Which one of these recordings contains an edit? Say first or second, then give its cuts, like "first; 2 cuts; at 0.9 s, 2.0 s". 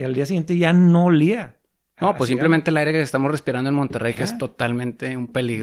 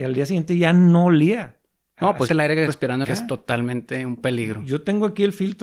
second; 3 cuts; at 2.3 s, 2.7 s, 3.0 s